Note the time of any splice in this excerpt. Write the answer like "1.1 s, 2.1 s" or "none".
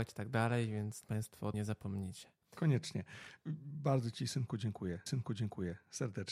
1.0 s, 1.5 s, 5.1 s